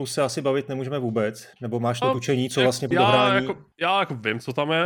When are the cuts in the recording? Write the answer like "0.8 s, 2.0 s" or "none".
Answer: 1.5 s, 2.0 s, 2.9 s, 3.7 s